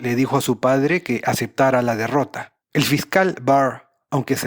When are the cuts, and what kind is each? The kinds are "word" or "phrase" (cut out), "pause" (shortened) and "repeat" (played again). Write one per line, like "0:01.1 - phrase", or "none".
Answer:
0:02.6 - pause